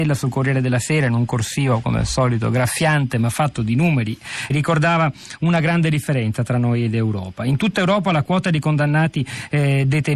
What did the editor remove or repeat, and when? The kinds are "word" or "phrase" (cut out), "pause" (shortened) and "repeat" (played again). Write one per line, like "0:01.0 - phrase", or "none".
0:04.5 - word

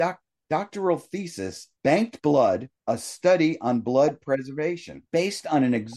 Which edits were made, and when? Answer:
0:01.8 - pause
0:02.8 - pause
0:05.1 - pause

